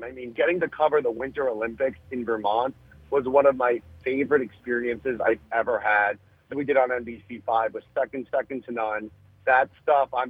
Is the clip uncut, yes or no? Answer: no